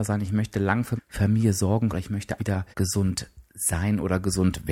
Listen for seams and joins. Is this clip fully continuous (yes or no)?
no